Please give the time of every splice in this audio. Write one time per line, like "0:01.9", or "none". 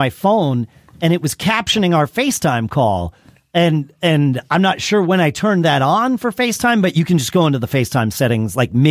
none